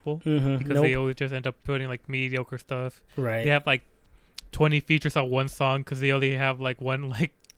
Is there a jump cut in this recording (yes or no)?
yes